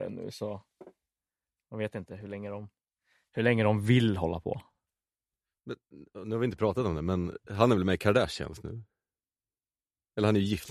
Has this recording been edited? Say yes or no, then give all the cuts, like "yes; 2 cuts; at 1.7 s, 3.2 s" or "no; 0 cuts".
no; 0 cuts